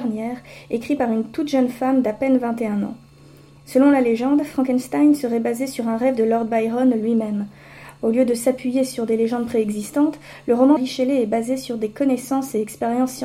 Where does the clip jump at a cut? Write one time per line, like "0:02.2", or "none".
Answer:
0:10.8